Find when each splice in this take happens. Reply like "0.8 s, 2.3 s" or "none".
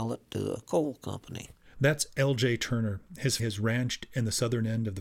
3.4 s